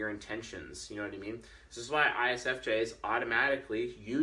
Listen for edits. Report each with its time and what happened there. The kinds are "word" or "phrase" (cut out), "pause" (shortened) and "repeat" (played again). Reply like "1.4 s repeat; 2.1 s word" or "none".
none